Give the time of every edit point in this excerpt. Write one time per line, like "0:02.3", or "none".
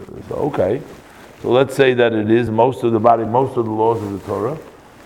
none